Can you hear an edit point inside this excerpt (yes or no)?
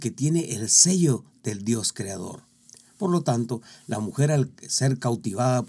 no